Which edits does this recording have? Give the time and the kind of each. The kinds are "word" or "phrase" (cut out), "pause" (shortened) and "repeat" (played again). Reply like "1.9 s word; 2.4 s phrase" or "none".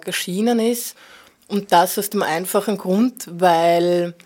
none

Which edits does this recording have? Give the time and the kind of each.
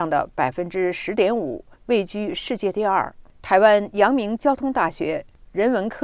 1.7 s pause; 3.3 s pause

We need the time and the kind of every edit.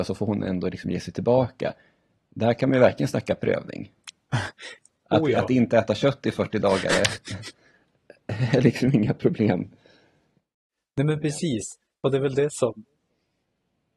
none

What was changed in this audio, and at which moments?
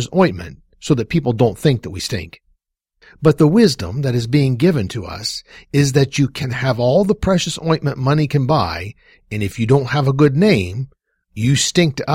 none

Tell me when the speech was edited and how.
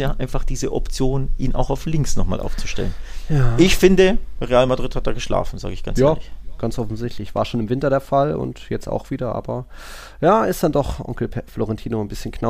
none

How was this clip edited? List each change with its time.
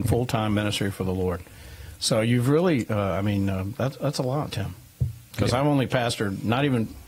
none

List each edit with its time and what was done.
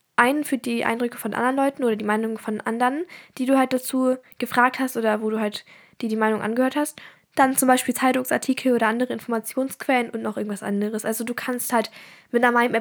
none

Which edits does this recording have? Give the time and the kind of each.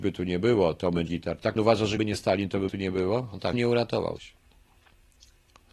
1.1 s word; 1.6 s word; 2.0 s word; 2.7 s word; 3.5 s word; 4.2 s word

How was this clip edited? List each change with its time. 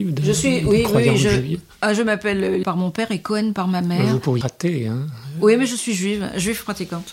2.6 s word; 4.4 s word

